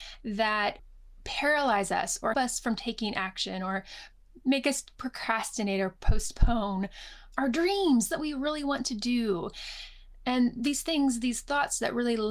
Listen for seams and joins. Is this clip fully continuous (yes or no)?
no